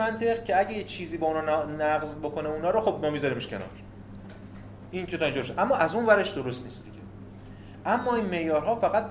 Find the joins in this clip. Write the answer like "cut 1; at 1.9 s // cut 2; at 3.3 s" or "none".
none